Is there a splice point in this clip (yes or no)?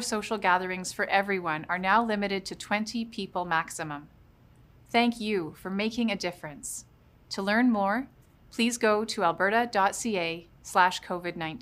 no